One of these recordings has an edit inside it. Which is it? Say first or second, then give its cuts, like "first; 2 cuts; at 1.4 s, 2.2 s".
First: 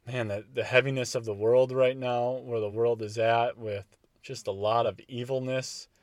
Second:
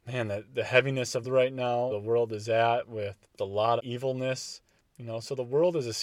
second; 4 cuts; at 1.2 s, 1.9 s, 3.4 s, 3.8 s